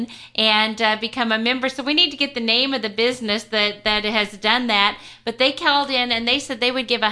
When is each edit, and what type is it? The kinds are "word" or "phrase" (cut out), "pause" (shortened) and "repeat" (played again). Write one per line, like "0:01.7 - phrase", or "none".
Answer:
none